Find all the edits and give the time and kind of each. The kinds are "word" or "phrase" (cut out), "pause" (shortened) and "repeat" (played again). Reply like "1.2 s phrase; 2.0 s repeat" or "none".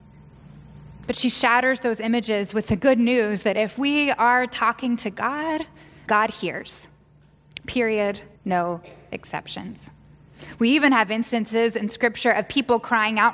6.1 s word; 8.4 s pause